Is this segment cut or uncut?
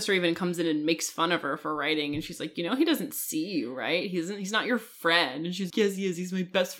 cut